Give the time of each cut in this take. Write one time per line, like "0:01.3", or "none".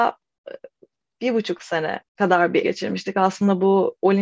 0:02.1
0:02.6